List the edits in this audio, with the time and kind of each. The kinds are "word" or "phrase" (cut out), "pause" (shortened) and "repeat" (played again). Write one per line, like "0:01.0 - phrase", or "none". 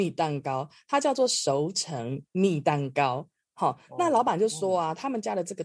none